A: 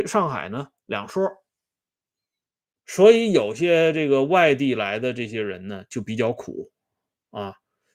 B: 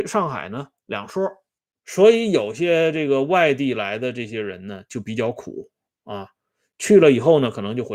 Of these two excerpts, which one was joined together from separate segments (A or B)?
B